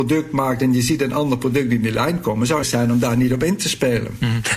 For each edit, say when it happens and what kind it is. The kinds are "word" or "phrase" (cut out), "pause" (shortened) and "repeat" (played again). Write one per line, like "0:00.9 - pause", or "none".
0:02.6 - phrase

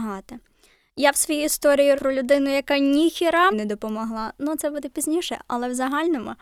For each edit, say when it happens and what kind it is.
0:02.0 - word
0:03.5 - word

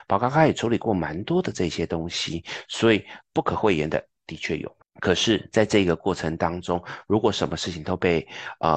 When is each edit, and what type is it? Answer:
0:03.2 - pause
0:04.8 - pause

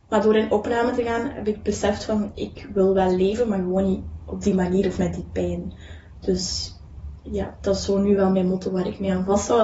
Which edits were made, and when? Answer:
none

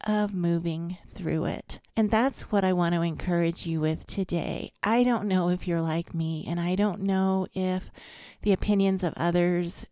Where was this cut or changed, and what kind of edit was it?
0:01.9 - pause

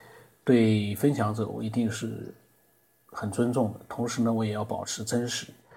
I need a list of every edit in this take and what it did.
none

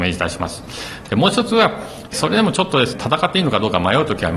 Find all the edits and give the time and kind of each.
0:02.9 - word

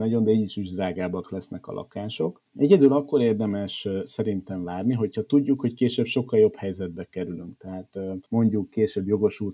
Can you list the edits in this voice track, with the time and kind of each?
0:02.5 - pause
0:08.3 - pause

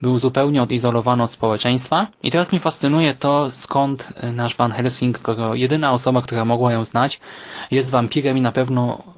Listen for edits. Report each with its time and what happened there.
0:02.1 - pause
0:05.2 - phrase

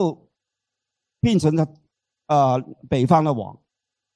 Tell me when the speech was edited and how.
none

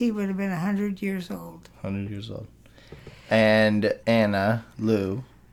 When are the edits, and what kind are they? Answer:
0:04.0 - pause

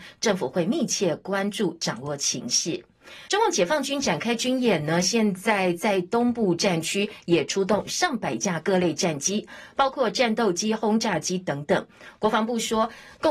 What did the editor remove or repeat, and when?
0:03.3 - pause

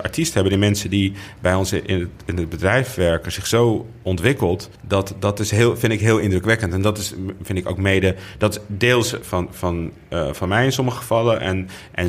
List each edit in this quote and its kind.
0:04.8 - pause
0:09.2 - phrase

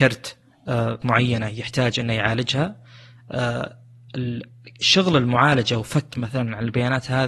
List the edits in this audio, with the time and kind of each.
0:01.0 - word
0:06.1 - word

